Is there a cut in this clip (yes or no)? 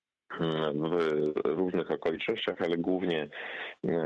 no